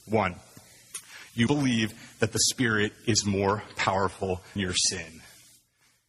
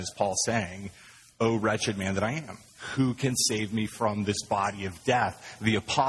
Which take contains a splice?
first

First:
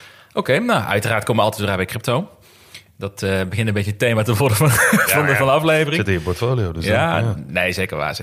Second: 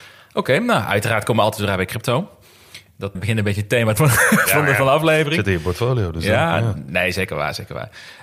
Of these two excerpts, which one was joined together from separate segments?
second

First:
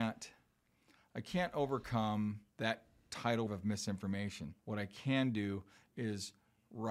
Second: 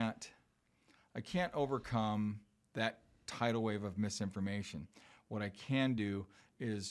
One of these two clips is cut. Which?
first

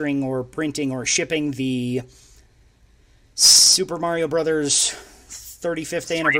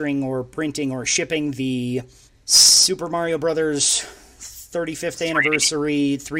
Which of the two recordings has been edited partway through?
second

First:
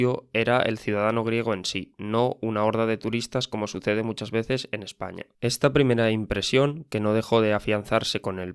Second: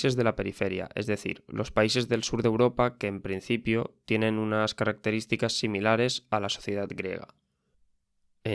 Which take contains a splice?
first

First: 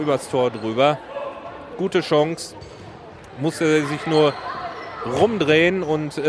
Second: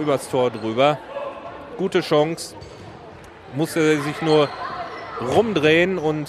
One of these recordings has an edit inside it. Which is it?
first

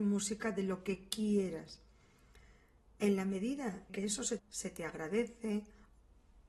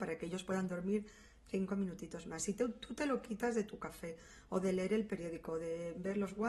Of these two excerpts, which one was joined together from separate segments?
first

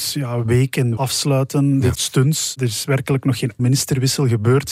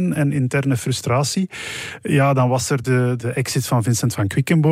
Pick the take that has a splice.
first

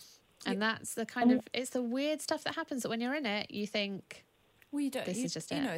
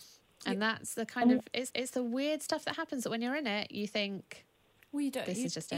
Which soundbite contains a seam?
second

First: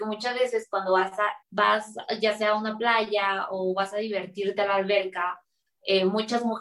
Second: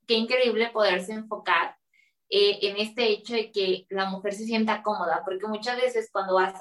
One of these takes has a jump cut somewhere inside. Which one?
first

